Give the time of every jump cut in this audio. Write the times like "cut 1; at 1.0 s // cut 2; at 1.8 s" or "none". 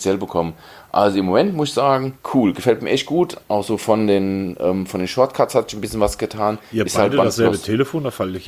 cut 1; at 2.2 s // cut 2; at 3.4 s